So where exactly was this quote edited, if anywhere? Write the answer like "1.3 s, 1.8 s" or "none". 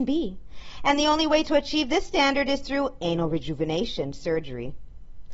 none